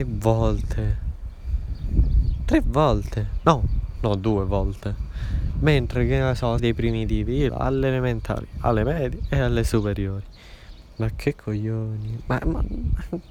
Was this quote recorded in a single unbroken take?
no; 2 cuts; at 6.6 s, 7.5 s

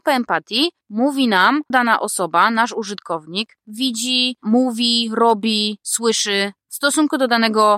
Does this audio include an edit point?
yes; 2 cuts; at 1.7 s, 3.6 s

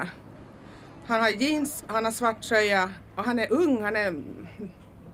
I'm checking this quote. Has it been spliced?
no; 0 cuts

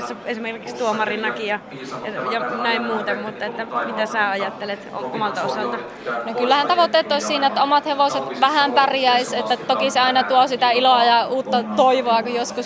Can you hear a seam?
no; 0 cuts

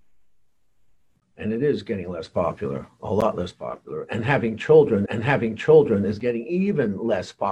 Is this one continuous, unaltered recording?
no; 1 cut; at 5.1 s

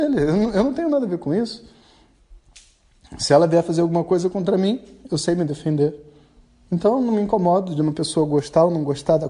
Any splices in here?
no; 0 cuts

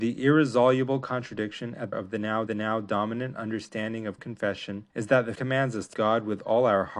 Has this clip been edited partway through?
yes; 6 cuts; at 1.9 s, 2.5 s, 4.2 s, 4.9 s, 5.3 s, 5.9 s

